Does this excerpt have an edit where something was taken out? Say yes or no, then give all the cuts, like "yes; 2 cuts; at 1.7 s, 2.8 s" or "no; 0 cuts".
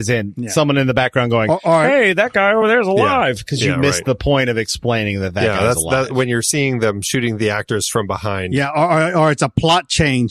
no; 0 cuts